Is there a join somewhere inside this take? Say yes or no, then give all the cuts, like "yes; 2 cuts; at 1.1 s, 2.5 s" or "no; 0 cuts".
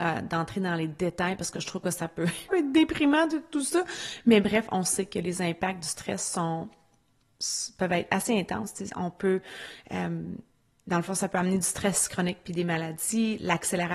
yes; 2 cuts; at 2.5 s, 10.5 s